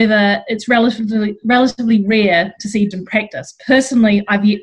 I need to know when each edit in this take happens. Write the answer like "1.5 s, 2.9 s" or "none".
2.9 s

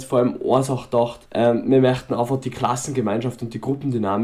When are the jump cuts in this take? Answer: 1.3 s

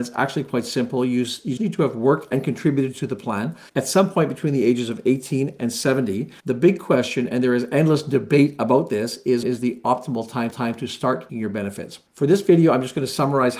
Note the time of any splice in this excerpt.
1.6 s, 3.7 s, 6.4 s, 9.4 s, 10.5 s, 11.3 s, 12.1 s

